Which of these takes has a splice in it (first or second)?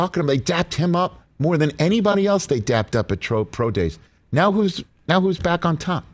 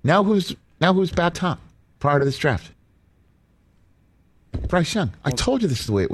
second